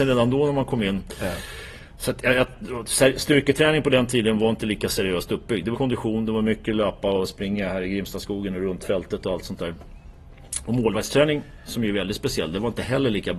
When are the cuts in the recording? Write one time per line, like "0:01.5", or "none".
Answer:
0:05.7